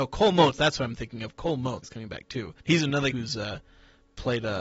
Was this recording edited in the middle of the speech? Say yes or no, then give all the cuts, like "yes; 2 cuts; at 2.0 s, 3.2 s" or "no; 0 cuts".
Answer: yes; 3 cuts; at 1.8 s, 2.6 s, 3.1 s